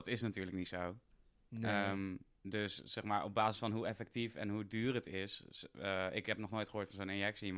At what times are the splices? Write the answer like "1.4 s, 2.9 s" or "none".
none